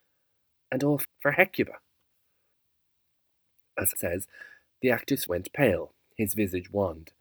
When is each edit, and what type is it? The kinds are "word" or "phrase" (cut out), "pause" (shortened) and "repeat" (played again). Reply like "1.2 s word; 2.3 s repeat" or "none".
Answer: 1.0 s word; 3.9 s word; 5.3 s word